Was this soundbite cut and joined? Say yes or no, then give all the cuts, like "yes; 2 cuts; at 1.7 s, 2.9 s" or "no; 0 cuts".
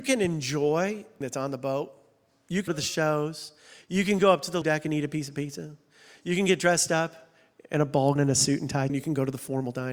yes; 5 cuts; at 1.2 s, 2.7 s, 4.6 s, 8.2 s, 8.9 s